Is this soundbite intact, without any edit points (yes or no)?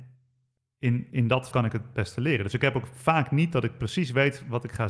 no